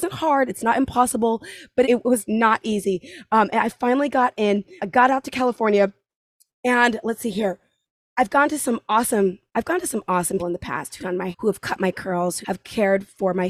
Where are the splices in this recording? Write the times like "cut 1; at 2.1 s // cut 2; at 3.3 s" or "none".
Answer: cut 1; at 1.8 s // cut 2; at 2.3 s // cut 3; at 4.8 s // cut 4; at 7.0 s // cut 5; at 10.4 s // cut 6; at 11.0 s // cut 7; at 11.3 s // cut 8; at 12.4 s